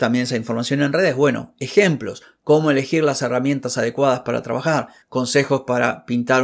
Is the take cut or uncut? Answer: uncut